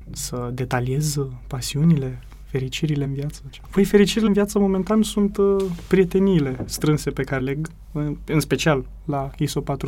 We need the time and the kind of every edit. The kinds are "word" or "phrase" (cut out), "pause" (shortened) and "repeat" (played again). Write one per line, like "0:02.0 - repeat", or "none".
0:03.1 - word
0:04.3 - word
0:07.4 - word